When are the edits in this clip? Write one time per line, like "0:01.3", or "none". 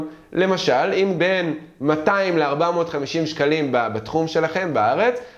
0:01.2